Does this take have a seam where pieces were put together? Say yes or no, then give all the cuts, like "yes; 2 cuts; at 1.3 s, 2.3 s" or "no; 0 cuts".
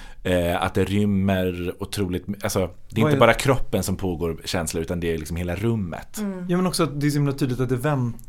no; 0 cuts